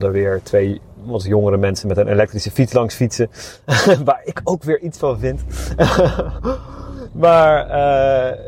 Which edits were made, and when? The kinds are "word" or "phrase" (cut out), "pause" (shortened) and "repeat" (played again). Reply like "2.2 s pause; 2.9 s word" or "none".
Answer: 3.6 s pause